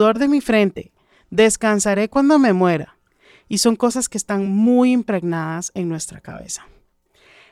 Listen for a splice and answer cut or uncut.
uncut